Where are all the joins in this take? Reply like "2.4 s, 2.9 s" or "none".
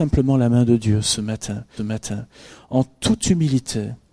1.8 s